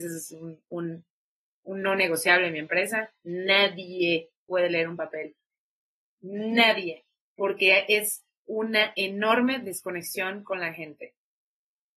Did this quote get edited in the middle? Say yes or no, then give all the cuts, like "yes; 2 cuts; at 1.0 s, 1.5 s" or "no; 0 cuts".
no; 0 cuts